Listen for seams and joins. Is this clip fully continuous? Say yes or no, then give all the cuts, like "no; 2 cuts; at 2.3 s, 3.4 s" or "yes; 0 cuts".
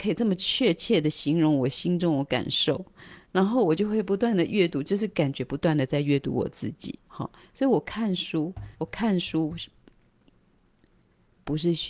no; 2 cuts; at 7.0 s, 8.7 s